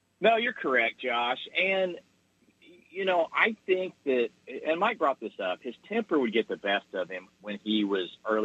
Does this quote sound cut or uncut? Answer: uncut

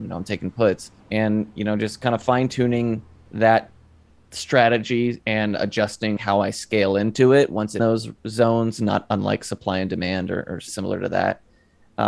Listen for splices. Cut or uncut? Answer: cut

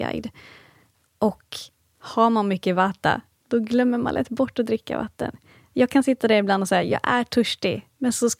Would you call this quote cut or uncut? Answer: uncut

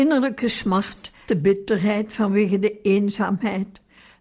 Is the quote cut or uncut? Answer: cut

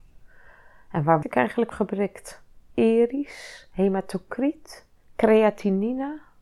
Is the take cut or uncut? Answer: cut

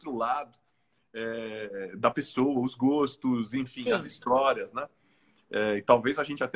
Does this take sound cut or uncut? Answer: uncut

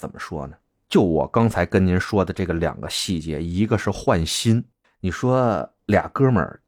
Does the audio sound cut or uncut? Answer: cut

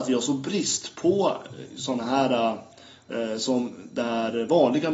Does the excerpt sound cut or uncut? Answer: uncut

